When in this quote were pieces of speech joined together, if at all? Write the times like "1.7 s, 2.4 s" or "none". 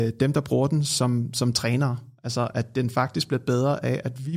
none